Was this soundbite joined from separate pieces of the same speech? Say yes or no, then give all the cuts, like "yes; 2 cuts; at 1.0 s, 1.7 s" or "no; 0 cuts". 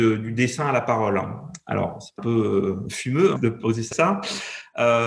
yes; 3 cuts; at 2.2 s, 3.3 s, 3.9 s